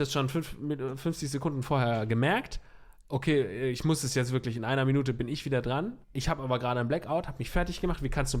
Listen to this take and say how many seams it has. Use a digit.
1